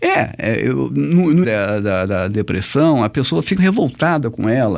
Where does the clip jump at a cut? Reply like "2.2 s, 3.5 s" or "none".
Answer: 1.4 s, 3.6 s